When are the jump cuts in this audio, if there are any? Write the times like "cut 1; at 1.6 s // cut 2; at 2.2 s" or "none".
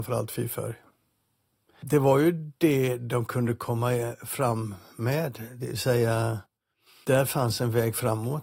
none